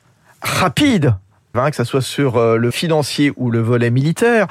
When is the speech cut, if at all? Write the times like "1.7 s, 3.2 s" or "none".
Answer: 1.5 s, 2.7 s